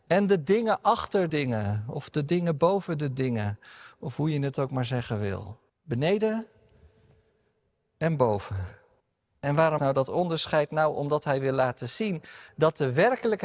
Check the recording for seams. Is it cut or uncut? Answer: cut